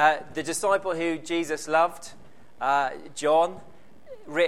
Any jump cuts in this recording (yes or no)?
no